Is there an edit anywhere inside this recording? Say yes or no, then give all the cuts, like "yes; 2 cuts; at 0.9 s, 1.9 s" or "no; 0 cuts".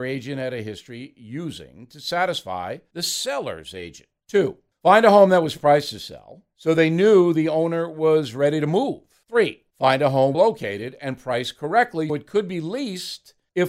yes; 2 cuts; at 10.3 s, 12.1 s